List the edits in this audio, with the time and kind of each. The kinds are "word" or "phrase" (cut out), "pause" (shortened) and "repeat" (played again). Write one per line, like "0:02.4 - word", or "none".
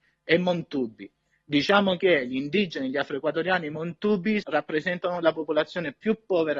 0:04.4 - word